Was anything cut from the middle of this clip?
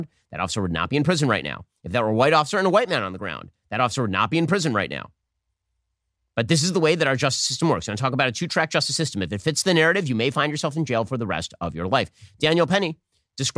no; 0 cuts

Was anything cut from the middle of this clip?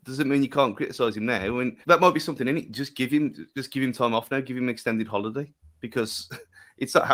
yes; 2 cuts; at 1.8 s, 5.6 s

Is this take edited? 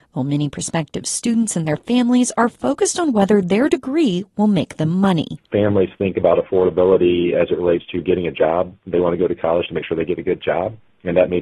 no; 0 cuts

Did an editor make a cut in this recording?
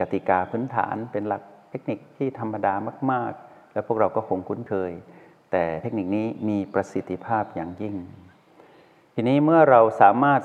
no; 0 cuts

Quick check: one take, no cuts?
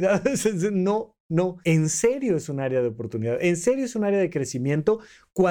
no; 1 cut; at 1.6 s

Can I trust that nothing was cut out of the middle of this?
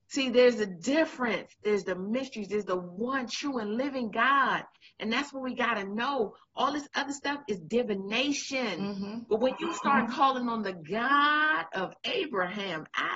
yes; 0 cuts

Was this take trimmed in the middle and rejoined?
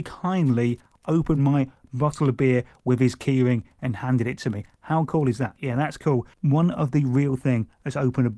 no; 0 cuts

